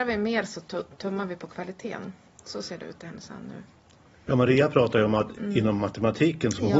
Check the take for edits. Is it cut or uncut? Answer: uncut